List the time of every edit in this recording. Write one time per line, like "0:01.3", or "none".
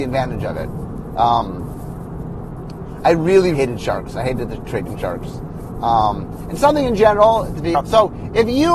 0:03.5
0:07.7